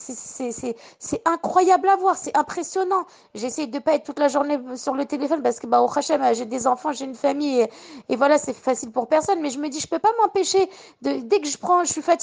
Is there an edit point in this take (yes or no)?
no